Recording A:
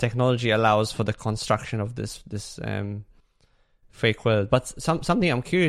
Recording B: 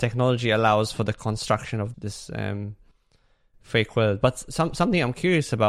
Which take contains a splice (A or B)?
B